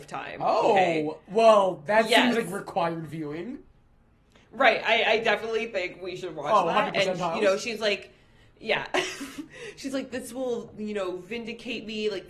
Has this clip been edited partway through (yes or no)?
no